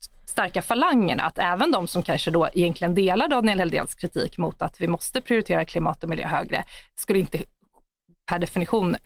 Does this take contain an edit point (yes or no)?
no